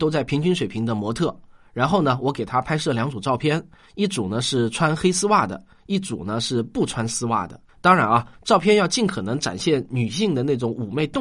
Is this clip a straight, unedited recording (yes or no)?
no